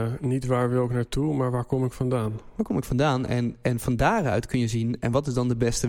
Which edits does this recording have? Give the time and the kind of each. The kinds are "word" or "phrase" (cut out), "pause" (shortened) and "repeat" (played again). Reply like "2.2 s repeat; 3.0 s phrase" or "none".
none